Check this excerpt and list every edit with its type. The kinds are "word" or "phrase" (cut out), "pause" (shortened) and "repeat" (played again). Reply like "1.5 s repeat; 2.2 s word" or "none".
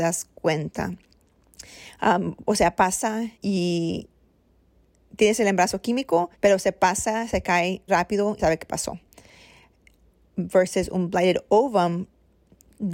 3.3 s pause; 6.3 s pause; 7.9 s word; 8.4 s phrase